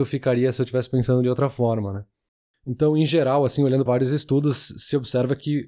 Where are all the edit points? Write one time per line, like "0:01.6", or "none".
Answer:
0:03.9